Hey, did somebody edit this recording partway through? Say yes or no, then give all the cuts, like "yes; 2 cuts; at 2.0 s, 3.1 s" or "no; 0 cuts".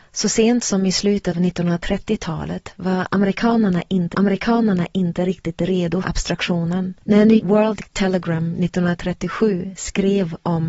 yes; 5 cuts; at 1.3 s, 4.1 s, 6.0 s, 7.0 s, 7.4 s